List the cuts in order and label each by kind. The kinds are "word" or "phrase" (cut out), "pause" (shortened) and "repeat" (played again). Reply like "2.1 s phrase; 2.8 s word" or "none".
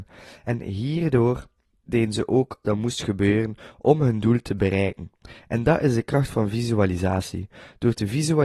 2.6 s word